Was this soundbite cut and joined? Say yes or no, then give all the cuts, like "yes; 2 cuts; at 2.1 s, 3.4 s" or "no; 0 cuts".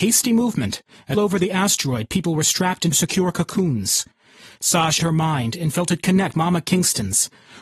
yes; 4 cuts; at 1.1 s, 2.9 s, 5.0 s, 6.3 s